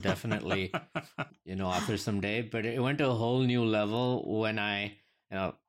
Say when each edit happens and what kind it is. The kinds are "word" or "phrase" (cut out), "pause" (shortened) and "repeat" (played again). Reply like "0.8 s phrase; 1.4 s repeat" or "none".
1.3 s word